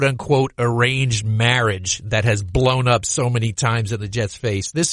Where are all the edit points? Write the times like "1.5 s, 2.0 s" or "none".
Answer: none